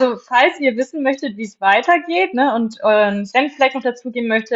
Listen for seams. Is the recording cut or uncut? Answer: uncut